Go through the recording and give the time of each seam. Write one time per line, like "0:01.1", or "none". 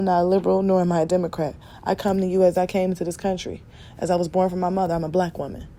none